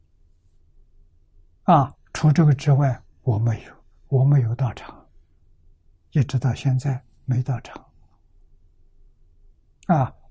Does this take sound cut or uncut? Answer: uncut